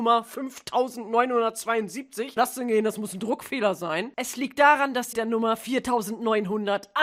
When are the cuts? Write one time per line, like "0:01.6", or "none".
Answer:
0:02.4
0:05.1